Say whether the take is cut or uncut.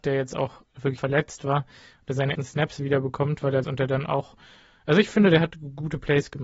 cut